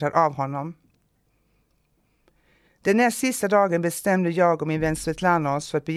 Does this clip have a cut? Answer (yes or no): no